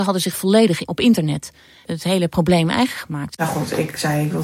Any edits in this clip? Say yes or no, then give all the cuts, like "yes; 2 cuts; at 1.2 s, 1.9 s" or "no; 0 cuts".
no; 0 cuts